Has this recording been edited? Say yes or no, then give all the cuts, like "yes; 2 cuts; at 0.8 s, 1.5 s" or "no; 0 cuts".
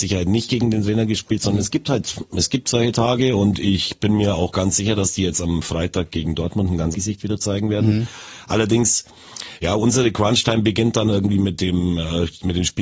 yes; 1 cut; at 6.9 s